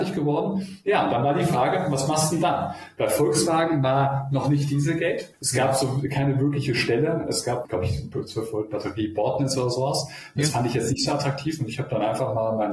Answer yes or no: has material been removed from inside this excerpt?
no